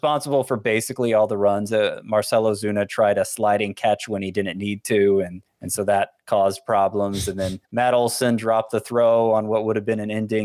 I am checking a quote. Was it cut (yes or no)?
yes